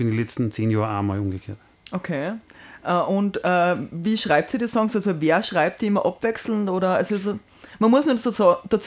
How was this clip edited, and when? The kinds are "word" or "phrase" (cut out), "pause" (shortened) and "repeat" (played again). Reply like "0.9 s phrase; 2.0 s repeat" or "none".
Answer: none